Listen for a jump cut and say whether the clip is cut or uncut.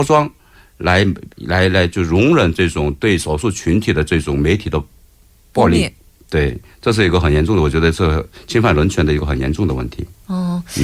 cut